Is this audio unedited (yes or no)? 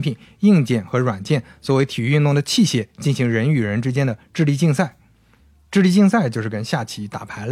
yes